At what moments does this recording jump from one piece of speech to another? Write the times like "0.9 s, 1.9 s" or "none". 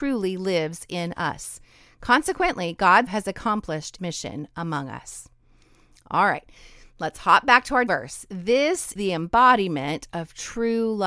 3.1 s, 4.0 s, 7.9 s, 9.0 s